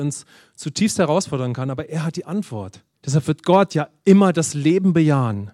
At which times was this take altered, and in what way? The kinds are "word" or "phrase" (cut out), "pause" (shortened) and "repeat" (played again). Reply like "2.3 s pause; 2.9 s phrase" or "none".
2.9 s pause